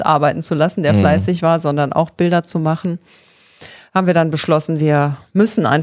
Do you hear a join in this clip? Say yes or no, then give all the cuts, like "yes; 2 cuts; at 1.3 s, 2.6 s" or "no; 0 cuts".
no; 0 cuts